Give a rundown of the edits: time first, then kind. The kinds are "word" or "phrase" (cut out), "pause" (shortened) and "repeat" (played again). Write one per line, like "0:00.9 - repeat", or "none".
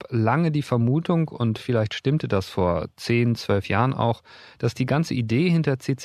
none